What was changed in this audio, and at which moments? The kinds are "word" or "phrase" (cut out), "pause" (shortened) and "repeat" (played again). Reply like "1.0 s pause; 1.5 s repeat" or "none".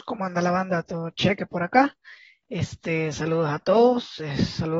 none

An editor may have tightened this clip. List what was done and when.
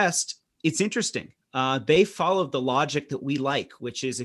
1.4 s pause

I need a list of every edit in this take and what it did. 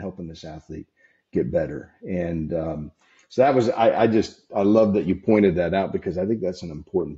none

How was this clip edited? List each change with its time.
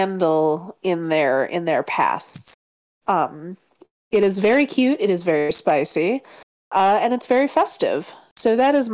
none

